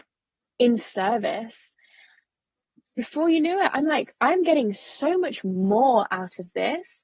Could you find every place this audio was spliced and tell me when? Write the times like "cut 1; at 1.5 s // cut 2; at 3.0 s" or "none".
none